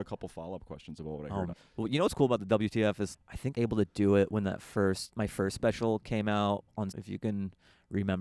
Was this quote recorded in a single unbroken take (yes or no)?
no